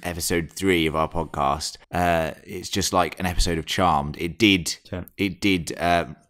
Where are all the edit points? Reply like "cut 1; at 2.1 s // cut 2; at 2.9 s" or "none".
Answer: cut 1; at 1.8 s // cut 2; at 4.8 s